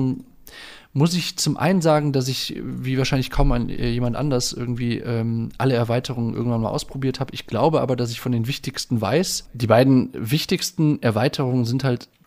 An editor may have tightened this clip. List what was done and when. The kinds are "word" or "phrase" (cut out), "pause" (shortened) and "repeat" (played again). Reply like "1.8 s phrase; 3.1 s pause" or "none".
none